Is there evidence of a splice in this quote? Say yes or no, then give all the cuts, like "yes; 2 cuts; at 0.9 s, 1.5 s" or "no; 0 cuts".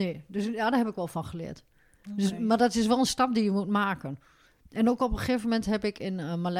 no; 0 cuts